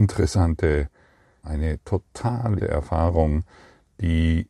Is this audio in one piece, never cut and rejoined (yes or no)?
no